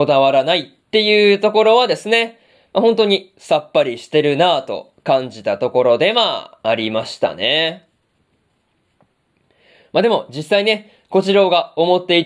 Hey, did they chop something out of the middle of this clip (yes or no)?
no